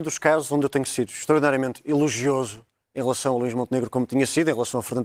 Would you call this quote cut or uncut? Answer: uncut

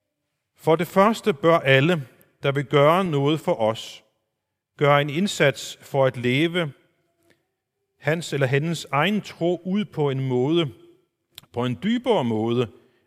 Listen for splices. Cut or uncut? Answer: uncut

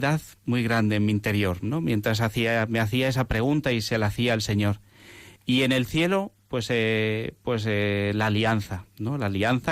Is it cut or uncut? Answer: cut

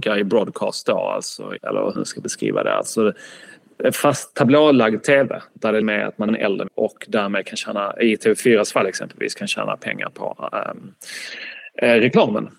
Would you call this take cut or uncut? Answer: cut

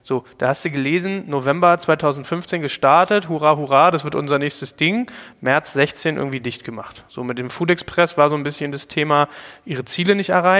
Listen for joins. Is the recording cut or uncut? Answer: uncut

